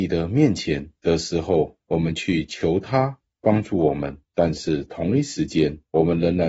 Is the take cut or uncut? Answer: cut